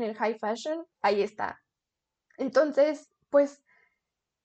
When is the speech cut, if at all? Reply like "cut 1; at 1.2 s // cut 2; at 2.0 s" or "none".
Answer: cut 1; at 0.9 s